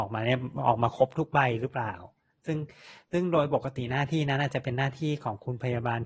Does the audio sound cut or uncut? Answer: uncut